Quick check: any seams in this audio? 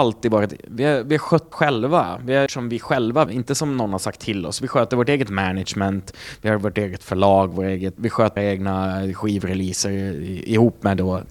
yes; 5 cuts; at 1.5 s, 2.5 s, 3.3 s, 8.0 s, 8.4 s

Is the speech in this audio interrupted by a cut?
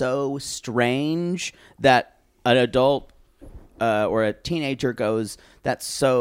no; 0 cuts

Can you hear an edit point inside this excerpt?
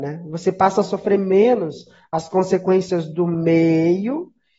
no; 0 cuts

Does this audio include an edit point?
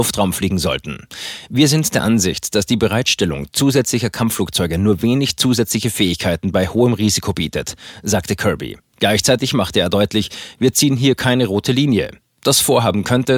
no; 0 cuts

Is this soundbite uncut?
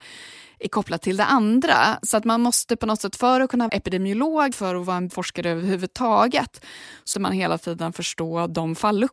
no; 4 cuts; at 3.7 s, 4.5 s, 5.1 s, 7.1 s

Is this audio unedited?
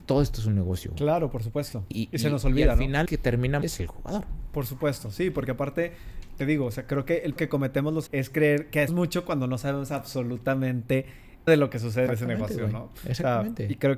no; 8 cuts; at 1.9 s, 3.1 s, 3.6 s, 7.4 s, 8.1 s, 8.9 s, 11.5 s, 12.1 s

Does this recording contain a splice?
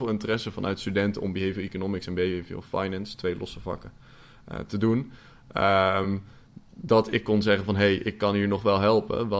no; 0 cuts

